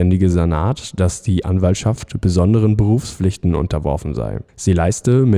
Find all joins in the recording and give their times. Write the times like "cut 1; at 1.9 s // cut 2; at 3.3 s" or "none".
cut 1; at 4.5 s